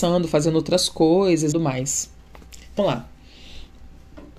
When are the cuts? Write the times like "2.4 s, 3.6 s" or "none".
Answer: 1.5 s, 2.8 s